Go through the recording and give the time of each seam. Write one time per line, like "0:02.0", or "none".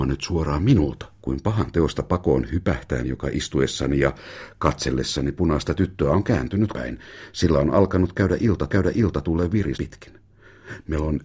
0:01.2
0:03.0
0:06.7
0:08.7
0:09.7